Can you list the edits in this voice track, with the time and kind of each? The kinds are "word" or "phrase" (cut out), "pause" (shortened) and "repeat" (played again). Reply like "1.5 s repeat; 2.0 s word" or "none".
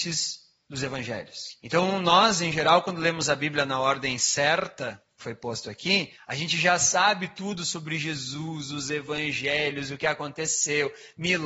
1.6 s pause; 5.2 s word